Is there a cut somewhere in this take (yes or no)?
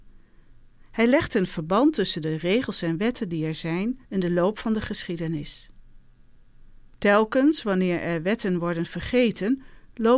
yes